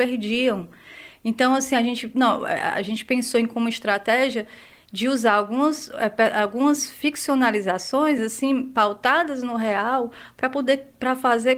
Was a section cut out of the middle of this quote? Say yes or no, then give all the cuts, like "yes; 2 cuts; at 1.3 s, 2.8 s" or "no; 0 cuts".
no; 0 cuts